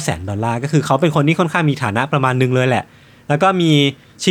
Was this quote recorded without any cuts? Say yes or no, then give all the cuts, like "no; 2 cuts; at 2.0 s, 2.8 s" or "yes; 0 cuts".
yes; 0 cuts